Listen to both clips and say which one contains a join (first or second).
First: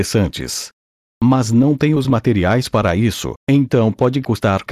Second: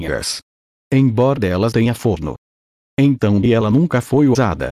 second